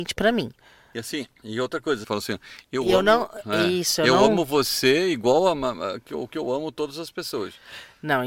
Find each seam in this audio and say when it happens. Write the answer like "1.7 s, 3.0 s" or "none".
2.0 s